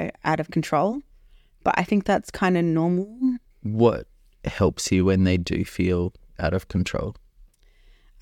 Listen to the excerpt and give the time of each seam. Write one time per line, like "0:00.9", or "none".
none